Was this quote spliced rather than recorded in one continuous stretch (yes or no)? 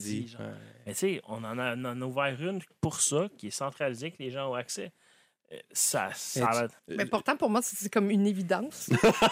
yes